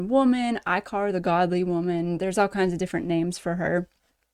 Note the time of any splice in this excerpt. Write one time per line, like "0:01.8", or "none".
none